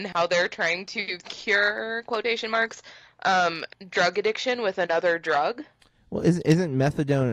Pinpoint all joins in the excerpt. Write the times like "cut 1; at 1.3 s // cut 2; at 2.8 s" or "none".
cut 1; at 1.2 s